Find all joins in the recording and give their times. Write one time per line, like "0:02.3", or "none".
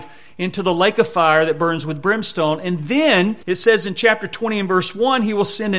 0:03.4